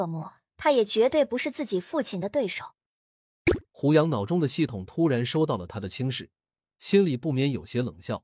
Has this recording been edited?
yes; 1 cut; at 3.6 s

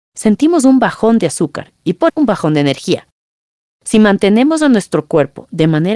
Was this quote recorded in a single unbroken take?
no; 1 cut; at 2.1 s

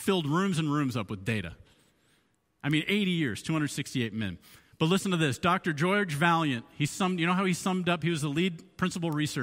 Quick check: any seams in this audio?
no; 0 cuts

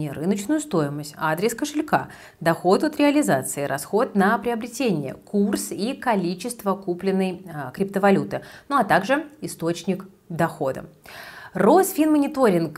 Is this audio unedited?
yes; 0 cuts

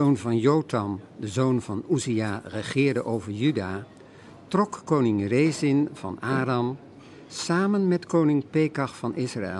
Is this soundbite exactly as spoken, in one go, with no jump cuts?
yes; 0 cuts

